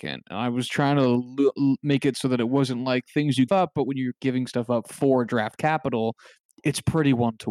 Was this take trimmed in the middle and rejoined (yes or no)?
yes